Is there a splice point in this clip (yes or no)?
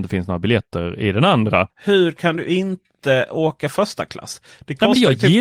no